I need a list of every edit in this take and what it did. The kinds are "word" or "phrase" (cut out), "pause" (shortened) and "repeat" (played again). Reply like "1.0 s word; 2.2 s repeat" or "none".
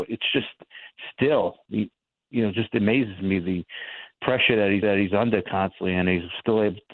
4.8 s repeat